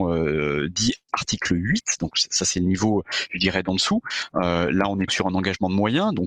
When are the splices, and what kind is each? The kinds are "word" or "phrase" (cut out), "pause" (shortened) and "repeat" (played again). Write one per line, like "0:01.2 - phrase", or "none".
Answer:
0:05.1 - word